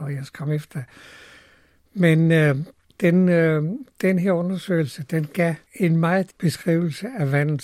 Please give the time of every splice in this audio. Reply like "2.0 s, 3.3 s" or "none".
6.3 s